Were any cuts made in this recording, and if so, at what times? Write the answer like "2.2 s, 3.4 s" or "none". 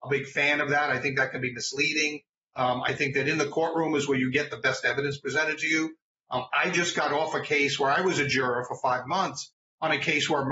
none

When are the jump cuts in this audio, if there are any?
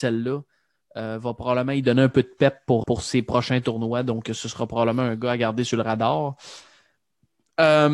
2.8 s

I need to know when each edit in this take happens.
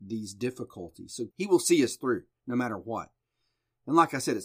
1.3 s

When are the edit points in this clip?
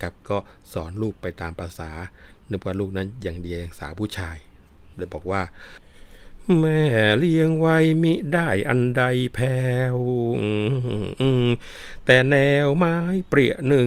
none

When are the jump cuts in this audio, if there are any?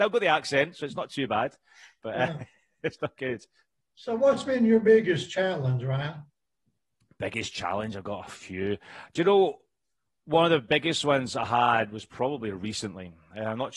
none

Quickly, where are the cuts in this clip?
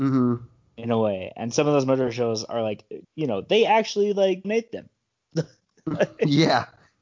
3.0 s, 4.4 s

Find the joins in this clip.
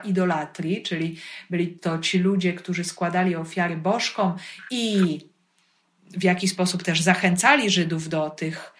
none

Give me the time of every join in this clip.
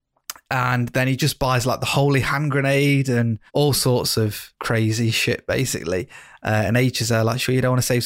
3.5 s, 4.6 s

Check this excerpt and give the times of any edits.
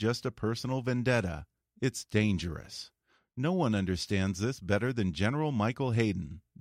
none

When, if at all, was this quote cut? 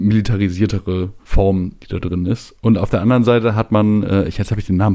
1.2 s

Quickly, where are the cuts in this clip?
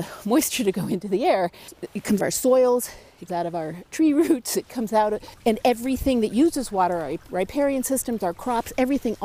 2.2 s, 3.3 s

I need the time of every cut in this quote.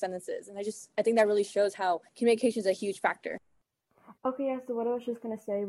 2.1 s, 4.2 s

